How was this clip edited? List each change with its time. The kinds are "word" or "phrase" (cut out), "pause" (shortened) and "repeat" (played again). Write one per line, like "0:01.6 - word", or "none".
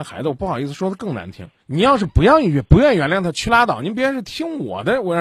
0:01.6 - pause